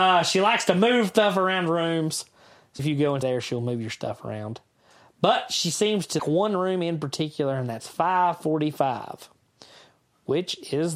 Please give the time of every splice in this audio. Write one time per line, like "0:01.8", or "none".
0:02.8
0:03.2
0:06.2